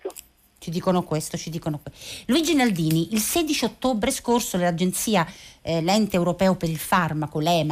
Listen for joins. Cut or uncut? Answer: uncut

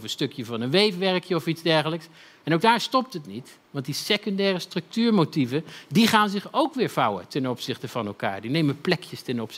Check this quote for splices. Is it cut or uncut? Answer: uncut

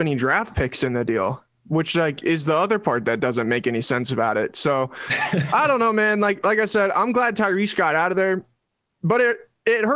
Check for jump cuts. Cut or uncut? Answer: uncut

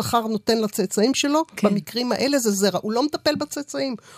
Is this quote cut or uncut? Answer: uncut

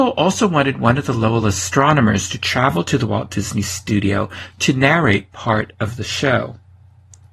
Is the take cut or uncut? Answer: uncut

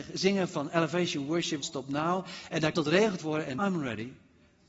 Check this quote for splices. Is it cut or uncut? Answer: cut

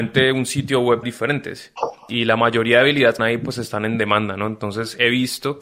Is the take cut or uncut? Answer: cut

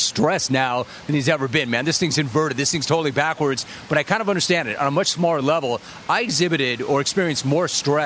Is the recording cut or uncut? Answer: uncut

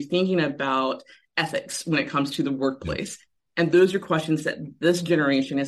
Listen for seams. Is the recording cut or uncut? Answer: uncut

